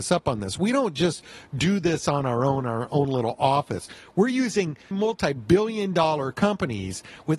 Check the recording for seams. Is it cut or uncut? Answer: cut